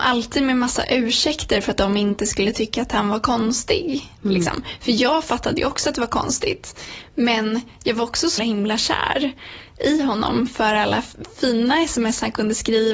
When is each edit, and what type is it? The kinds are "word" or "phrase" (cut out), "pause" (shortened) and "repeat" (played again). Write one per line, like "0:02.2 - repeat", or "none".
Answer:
0:08.4 - word